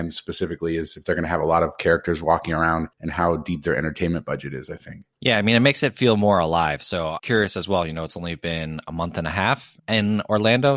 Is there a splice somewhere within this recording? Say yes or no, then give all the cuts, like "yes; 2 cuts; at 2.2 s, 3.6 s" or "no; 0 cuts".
yes; 4 cuts; at 2.9 s, 5.1 s, 7.2 s, 9.8 s